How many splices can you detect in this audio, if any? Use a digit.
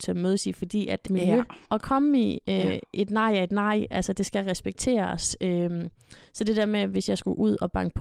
2